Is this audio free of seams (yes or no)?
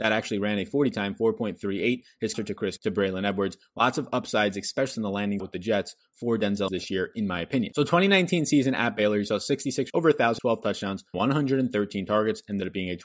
no